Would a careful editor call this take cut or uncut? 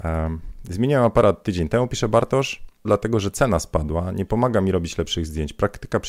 cut